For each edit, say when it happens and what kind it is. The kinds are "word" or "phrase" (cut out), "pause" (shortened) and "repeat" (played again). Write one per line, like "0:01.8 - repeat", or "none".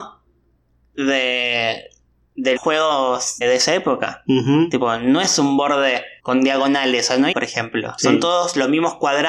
0:02.6 - word
0:03.4 - word
0:06.2 - pause
0:07.3 - word